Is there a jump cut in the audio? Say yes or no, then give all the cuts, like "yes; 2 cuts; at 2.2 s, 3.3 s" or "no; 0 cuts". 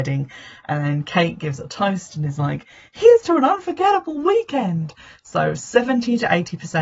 no; 0 cuts